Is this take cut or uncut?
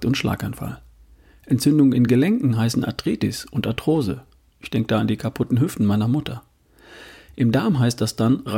uncut